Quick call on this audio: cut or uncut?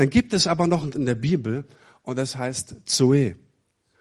cut